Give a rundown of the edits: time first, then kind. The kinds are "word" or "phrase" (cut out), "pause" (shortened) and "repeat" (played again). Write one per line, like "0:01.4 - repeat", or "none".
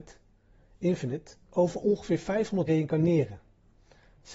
0:01.5 - word
0:02.7 - phrase